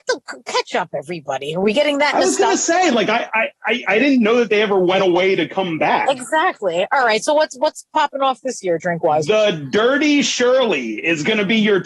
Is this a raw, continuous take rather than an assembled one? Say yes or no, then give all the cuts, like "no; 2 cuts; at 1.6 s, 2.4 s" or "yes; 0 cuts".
yes; 0 cuts